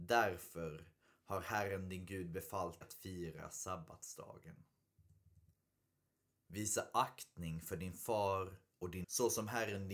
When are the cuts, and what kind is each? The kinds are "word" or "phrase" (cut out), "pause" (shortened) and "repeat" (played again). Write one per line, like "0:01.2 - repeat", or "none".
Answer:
0:02.8 - word
0:09.0 - word